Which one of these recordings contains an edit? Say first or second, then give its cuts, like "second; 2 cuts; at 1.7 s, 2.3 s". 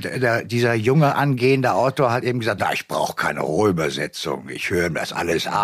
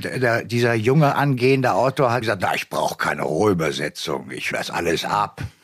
second; 2 cuts; at 2.2 s, 4.5 s